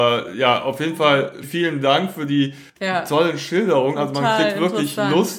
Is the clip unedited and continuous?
no; 2 cuts; at 1.4 s, 2.7 s

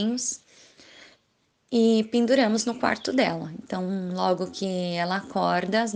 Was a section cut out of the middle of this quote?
no; 0 cuts

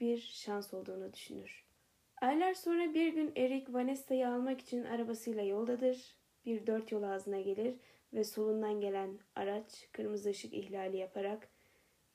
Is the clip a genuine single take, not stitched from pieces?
yes; 0 cuts

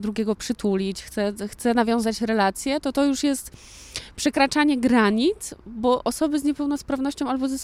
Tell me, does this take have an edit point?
no; 0 cuts

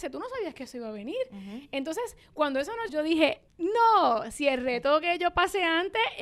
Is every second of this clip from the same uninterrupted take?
no; 2 cuts; at 2.9 s, 3.5 s

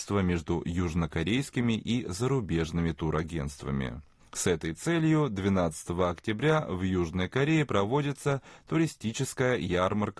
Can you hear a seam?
no; 0 cuts

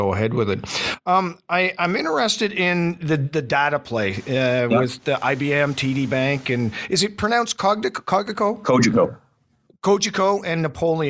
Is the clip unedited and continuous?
yes; 0 cuts

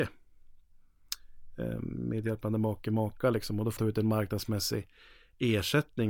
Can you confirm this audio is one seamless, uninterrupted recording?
no; 1 cut; at 3.8 s

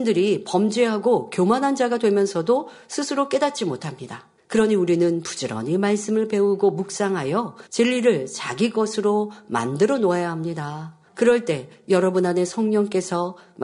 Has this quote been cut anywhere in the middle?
yes; 3 cuts; at 4.4 s, 7.7 s, 11.1 s

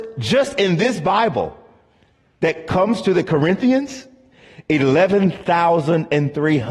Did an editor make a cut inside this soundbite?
no; 0 cuts

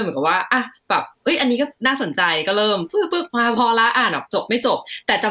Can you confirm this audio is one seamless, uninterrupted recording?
no; 1 cut; at 1.1 s

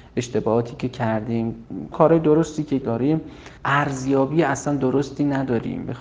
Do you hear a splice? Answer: yes; 3 cuts; at 1.9 s, 2.8 s, 3.6 s

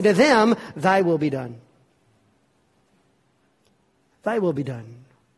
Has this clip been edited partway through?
no; 0 cuts

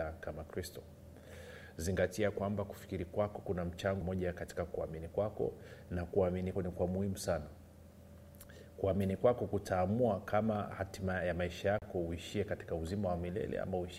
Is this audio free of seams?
no; 2 cuts; at 4.0 s, 6.6 s

